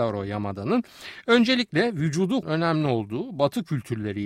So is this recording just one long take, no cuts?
no; 1 cut; at 2.4 s

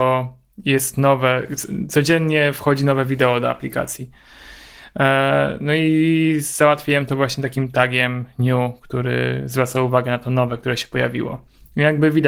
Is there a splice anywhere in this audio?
no; 0 cuts

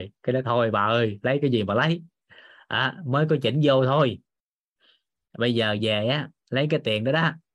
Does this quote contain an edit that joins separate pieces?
no; 0 cuts

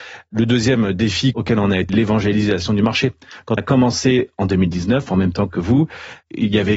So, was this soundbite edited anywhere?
yes; 2 cuts; at 1.9 s, 3.6 s

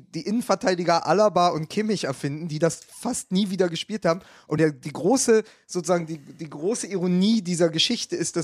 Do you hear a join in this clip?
no; 0 cuts

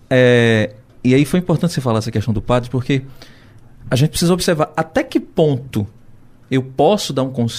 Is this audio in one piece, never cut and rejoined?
yes; 0 cuts

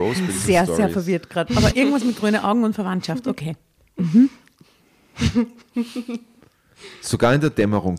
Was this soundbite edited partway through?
yes; 1 cut; at 1.7 s

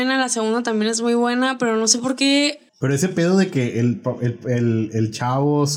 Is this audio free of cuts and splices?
no; 1 cut; at 2.7 s

